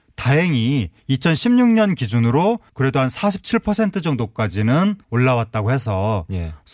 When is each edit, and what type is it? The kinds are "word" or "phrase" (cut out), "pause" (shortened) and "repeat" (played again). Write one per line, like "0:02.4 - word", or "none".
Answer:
0:01.0 - pause
0:02.7 - pause
0:05.0 - pause

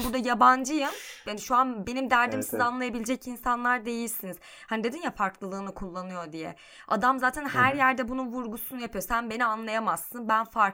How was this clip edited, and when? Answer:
none

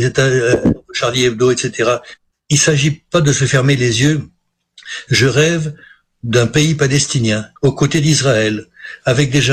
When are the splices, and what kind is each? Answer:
0:02.3 - pause
0:07.6 - pause

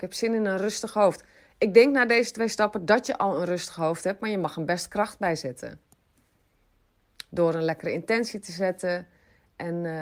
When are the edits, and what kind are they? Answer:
none

